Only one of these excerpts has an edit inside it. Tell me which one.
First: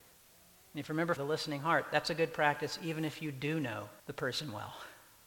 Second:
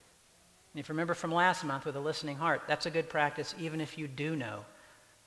first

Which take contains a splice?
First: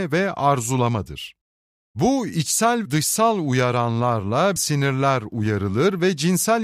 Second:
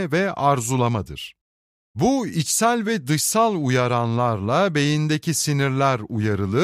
first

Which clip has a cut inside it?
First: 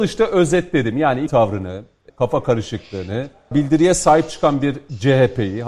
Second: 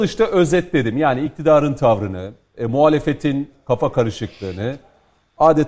first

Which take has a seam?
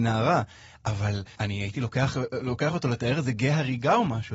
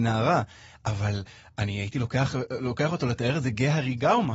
first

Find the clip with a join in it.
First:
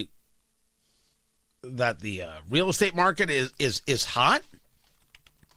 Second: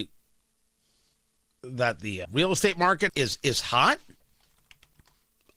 second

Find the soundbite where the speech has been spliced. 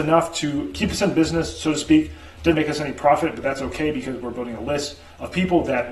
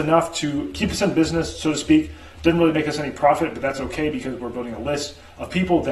first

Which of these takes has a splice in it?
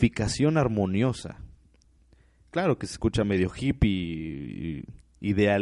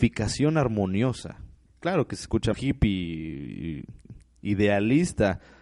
second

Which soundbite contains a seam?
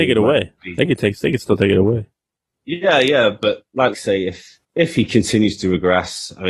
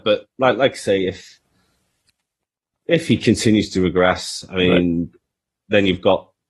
first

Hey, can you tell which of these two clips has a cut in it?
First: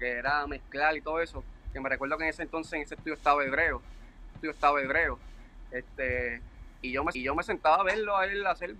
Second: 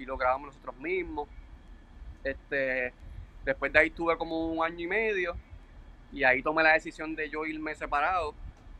first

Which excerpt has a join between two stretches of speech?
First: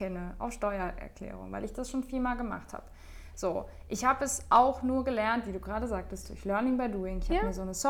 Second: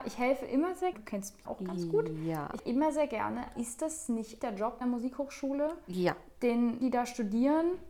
second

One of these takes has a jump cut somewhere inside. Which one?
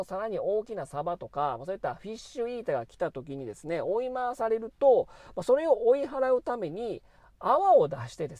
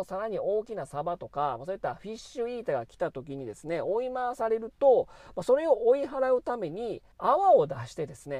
second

